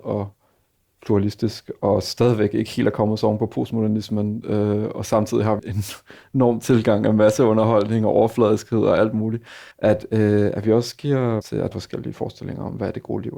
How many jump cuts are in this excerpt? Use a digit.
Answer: 4